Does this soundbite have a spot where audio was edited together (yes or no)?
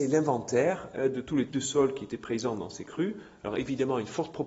yes